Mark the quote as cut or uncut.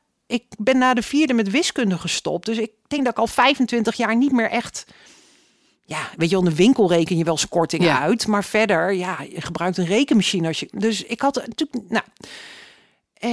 uncut